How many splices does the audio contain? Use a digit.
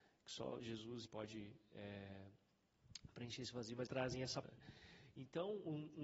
3